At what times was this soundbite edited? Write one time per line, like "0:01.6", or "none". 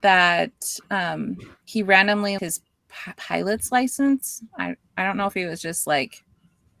0:02.4
0:03.2
0:04.5